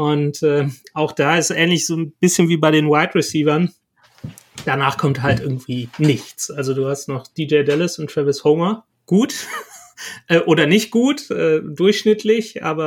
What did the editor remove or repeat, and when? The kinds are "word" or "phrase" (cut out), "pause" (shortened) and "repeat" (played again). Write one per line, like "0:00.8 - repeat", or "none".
0:08.9 - pause